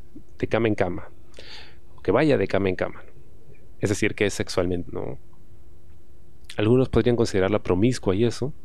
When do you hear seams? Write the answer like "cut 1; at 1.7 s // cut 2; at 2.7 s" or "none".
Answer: cut 1; at 4.9 s